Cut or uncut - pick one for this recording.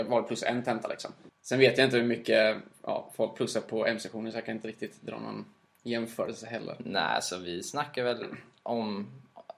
uncut